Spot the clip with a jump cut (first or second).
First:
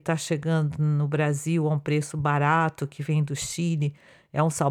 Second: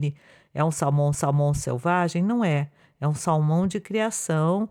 second